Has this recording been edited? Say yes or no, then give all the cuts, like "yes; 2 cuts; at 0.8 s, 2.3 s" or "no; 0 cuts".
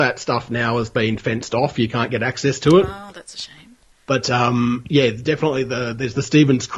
no; 0 cuts